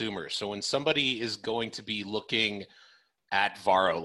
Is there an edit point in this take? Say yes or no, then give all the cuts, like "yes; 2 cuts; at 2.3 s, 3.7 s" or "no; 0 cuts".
no; 0 cuts